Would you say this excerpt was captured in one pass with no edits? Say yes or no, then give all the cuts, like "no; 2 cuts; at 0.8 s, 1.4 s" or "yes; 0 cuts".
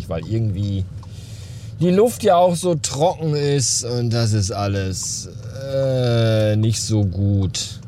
yes; 0 cuts